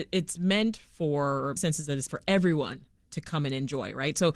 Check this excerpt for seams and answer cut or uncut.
cut